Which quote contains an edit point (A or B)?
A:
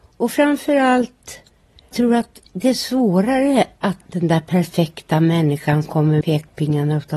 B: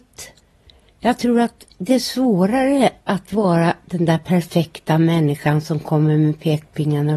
A